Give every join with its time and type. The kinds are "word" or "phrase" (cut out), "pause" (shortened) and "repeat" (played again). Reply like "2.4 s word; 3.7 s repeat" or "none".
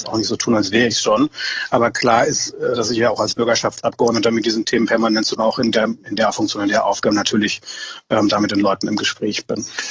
2.7 s word; 5.4 s phrase